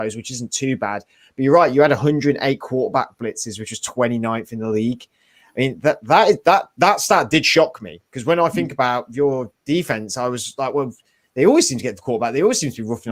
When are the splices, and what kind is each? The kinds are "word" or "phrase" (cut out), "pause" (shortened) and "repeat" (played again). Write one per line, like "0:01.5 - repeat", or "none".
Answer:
none